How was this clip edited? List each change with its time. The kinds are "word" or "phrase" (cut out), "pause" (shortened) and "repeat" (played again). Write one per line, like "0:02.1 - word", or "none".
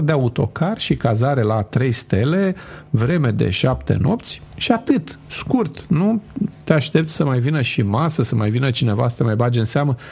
none